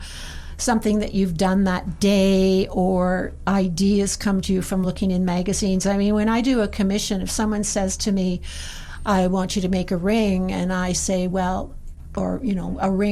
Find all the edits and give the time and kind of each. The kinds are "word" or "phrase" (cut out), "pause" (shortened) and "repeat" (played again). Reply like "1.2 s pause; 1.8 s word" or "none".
none